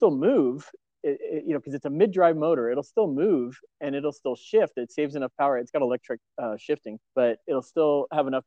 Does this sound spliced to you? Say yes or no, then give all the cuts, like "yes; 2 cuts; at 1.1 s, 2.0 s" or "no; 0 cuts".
yes; 1 cut; at 7.1 s